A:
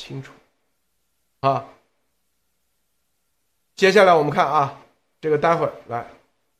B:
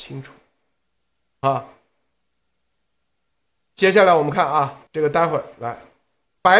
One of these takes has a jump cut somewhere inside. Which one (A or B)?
B